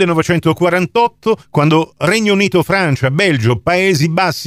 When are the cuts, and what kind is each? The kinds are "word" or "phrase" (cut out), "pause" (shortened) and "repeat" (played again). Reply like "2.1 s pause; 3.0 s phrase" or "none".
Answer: 1.4 s pause